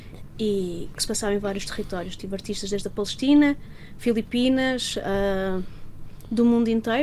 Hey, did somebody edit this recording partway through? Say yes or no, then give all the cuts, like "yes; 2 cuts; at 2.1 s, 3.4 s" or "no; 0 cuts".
yes; 1 cut; at 1.0 s